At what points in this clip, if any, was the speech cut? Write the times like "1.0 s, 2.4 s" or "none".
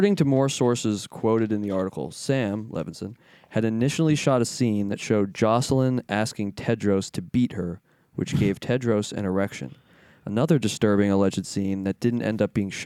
none